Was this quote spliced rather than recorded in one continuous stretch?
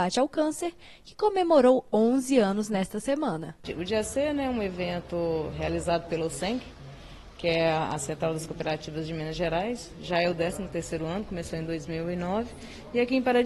no; 0 cuts

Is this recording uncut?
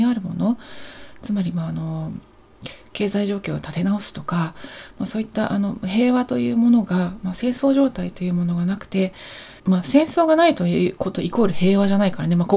no; 1 cut; at 9.6 s

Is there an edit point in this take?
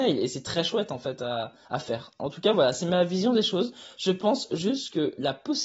yes; 1 cut; at 1.6 s

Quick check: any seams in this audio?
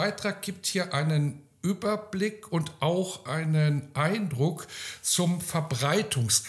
no; 0 cuts

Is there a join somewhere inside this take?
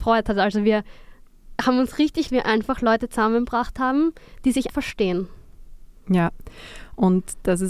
yes; 2 cuts; at 2.3 s, 4.7 s

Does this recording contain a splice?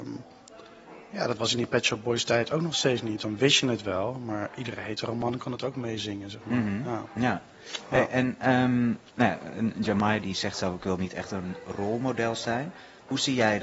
no; 0 cuts

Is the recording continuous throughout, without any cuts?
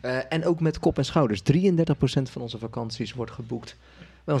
yes; 0 cuts

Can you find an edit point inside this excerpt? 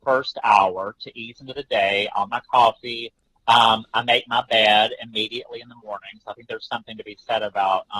yes; 1 cut; at 2.3 s

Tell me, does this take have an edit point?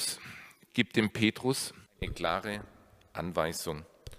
yes; 1 cut; at 1.9 s

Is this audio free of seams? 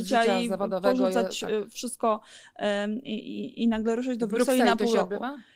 yes; 0 cuts

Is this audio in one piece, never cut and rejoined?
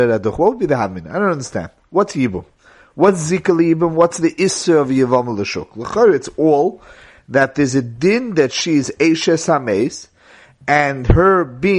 yes; 0 cuts

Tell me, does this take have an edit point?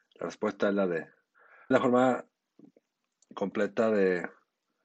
yes; 1 cut; at 1.7 s

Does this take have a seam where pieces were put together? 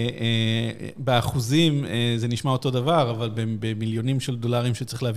no; 0 cuts

